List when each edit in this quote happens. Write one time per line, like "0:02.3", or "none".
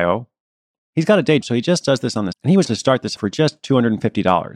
0:01.4
0:02.3
0:02.6
0:03.2